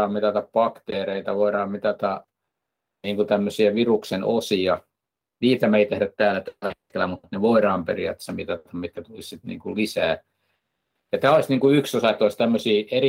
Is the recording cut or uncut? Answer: uncut